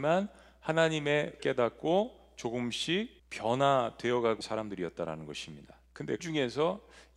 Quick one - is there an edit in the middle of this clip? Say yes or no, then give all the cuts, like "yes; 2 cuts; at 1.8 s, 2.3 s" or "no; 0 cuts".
yes; 4 cuts; at 1.4 s, 3.2 s, 4.4 s, 6.2 s